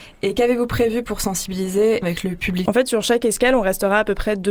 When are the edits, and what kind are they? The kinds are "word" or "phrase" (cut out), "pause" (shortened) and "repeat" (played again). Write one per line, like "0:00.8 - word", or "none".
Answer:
0:02.0 - phrase
0:02.7 - phrase